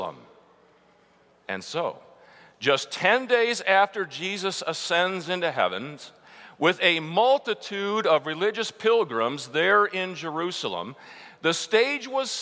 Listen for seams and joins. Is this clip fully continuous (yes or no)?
yes